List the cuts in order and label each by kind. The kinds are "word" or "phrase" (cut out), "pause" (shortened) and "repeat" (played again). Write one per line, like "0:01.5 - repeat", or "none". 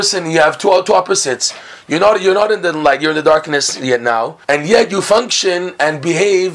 0:04.4 - pause